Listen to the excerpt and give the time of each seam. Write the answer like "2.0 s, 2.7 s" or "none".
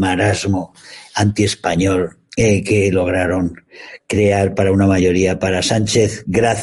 none